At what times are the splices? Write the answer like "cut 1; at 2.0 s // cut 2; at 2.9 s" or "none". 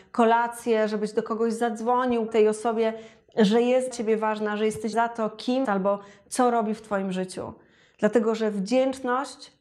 cut 1; at 2.3 s // cut 2; at 3.9 s // cut 3; at 4.9 s // cut 4; at 5.6 s